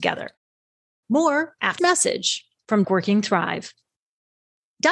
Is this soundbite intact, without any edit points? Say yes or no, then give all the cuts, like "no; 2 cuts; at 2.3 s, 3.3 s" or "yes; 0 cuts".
no; 2 cuts; at 1.8 s, 2.8 s